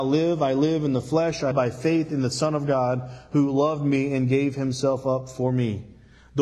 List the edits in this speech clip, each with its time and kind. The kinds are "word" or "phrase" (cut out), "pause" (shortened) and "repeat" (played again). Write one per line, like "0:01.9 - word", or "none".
0:01.5 - word